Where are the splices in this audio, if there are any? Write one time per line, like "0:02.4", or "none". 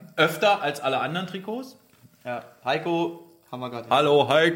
none